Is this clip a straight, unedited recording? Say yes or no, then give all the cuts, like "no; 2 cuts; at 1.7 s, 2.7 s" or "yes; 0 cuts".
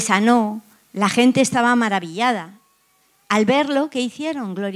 yes; 0 cuts